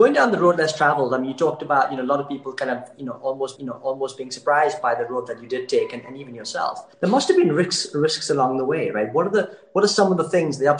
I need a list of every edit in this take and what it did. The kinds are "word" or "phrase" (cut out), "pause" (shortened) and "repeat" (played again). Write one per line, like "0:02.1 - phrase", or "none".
0:03.6 - repeat
0:06.9 - pause